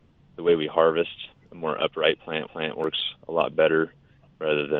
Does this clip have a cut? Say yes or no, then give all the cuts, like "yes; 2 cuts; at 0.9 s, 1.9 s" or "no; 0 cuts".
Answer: yes; 2 cuts; at 1.4 s, 2.5 s